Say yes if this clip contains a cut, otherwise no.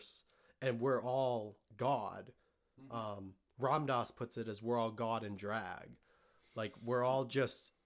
no